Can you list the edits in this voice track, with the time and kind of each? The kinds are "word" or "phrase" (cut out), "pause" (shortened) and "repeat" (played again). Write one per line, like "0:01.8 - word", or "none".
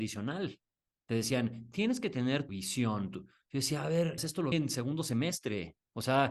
0:02.5 - phrase
0:04.2 - word
0:04.5 - word